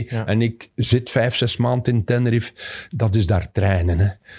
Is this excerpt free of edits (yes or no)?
yes